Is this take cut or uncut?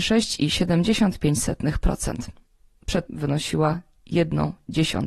cut